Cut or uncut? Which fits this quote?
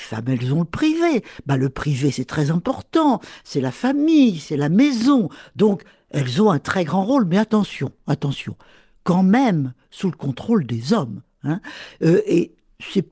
uncut